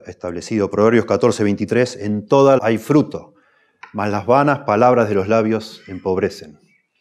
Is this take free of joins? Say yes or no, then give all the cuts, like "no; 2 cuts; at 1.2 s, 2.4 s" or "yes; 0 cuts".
no; 1 cut; at 2.6 s